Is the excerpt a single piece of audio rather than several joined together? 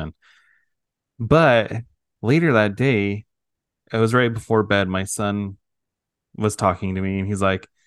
yes; 0 cuts

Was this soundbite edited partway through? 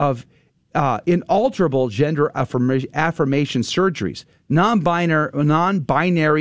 no; 0 cuts

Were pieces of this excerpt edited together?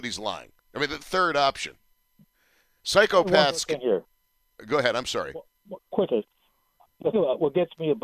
yes; 4 cuts; at 1.0 s, 2.3 s, 6.1 s, 7.1 s

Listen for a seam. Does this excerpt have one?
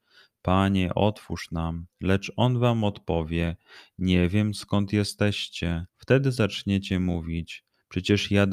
yes; 2 cuts; at 1.9 s, 5.9 s

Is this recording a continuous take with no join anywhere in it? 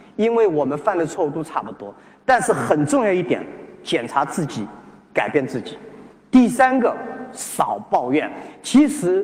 yes; 0 cuts

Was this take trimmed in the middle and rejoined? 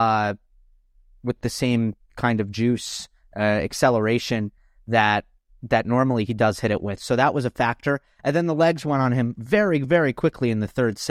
no; 0 cuts

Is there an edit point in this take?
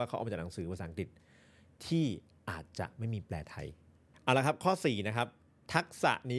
no; 0 cuts

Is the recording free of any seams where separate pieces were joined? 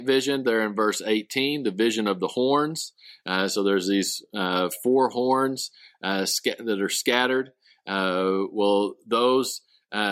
yes; 0 cuts

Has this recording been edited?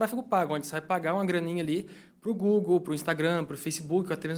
no; 0 cuts

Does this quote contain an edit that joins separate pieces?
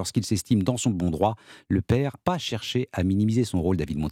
yes; 1 cut; at 2.2 s

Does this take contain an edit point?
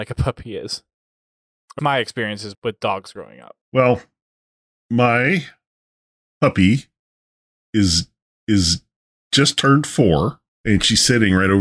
yes; 5 cuts; at 1.8 s, 2.5 s, 3.6 s, 8.3 s, 10.5 s

